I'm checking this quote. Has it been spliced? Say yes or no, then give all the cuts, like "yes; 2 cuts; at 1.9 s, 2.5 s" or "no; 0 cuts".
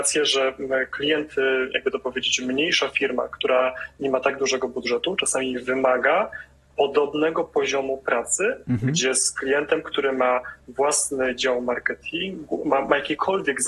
no; 0 cuts